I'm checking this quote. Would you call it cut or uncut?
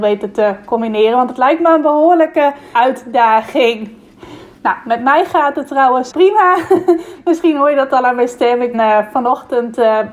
cut